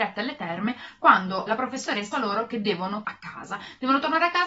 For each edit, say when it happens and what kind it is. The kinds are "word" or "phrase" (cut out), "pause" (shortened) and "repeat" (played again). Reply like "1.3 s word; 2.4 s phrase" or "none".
1.5 s word; 2.1 s word; 3.0 s word